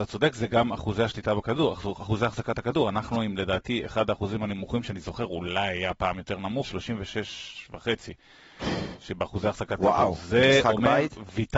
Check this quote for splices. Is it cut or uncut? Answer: cut